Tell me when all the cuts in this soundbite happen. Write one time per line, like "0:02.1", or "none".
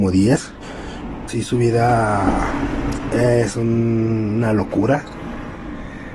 0:01.3